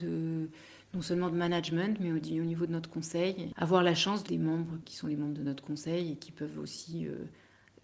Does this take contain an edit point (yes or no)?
yes